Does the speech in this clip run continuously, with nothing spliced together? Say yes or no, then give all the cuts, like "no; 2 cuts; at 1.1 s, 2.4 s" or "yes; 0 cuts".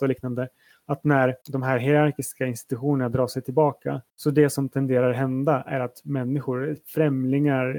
no; 2 cuts; at 1.4 s, 4.1 s